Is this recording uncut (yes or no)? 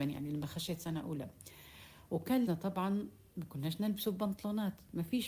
no